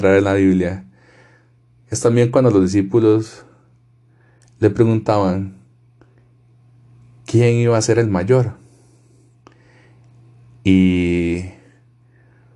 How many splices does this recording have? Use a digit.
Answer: 0